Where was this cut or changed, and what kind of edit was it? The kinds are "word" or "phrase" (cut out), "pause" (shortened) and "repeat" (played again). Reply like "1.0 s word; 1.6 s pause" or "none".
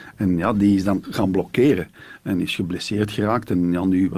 1.0 s word